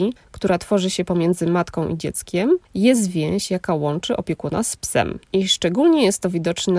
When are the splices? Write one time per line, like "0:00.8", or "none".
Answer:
0:02.6
0:05.2